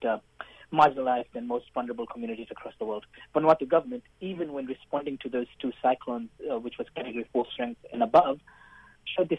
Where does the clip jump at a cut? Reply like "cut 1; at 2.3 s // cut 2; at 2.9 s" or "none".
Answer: cut 1; at 4.1 s